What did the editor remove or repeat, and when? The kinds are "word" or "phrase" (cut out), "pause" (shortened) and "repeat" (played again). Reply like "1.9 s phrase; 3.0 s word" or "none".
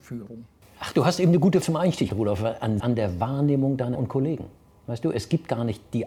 1.6 s word; 2.1 s word; 2.8 s word; 3.9 s word